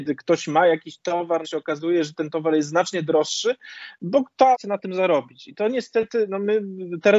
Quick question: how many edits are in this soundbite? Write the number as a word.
two